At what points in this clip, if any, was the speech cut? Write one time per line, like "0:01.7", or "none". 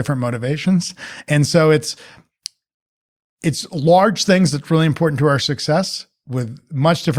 none